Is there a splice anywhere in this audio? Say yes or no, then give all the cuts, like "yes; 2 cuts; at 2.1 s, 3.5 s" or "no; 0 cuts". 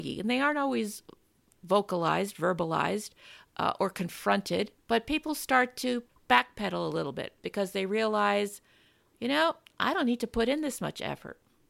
no; 0 cuts